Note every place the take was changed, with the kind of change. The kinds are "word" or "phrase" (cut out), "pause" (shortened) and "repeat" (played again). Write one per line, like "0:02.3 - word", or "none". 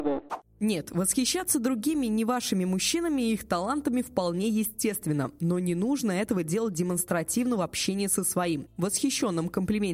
none